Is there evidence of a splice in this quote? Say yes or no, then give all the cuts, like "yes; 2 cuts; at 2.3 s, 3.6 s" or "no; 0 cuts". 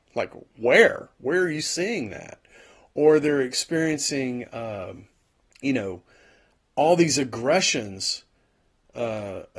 yes; 1 cut; at 5.3 s